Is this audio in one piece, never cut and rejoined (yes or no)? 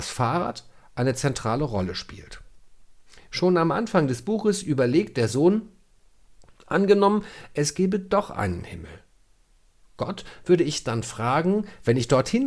yes